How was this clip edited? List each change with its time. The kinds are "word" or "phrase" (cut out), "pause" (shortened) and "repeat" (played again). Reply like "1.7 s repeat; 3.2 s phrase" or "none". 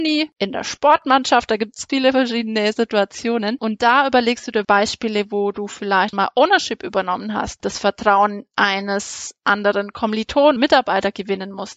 1.9 s word; 4.6 s word; 6.1 s word; 7.6 s word; 10.6 s word

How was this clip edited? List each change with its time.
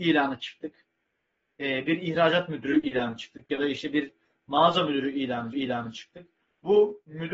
5.5 s repeat

